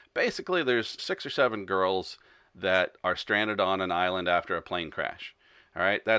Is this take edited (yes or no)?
yes